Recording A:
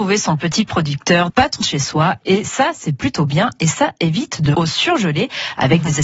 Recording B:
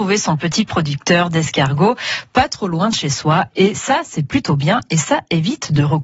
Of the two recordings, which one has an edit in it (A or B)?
A